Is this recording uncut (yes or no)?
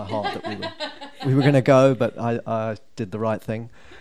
yes